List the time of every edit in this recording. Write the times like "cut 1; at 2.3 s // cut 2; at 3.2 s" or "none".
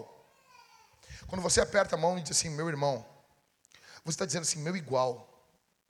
none